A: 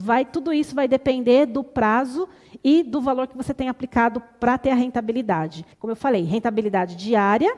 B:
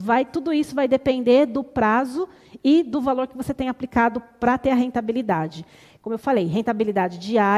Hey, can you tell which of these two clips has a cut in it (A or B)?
A